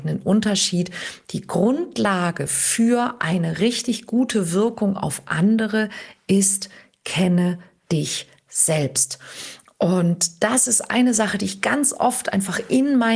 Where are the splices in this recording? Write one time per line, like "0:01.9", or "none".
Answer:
none